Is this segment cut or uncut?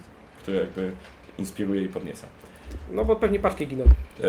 uncut